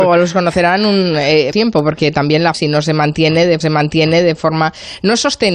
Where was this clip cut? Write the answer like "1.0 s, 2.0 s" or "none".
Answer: 1.5 s, 2.5 s, 3.6 s